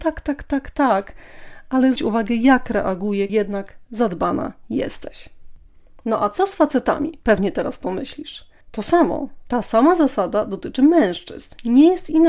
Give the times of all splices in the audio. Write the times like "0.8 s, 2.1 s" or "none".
2.0 s, 3.3 s, 8.6 s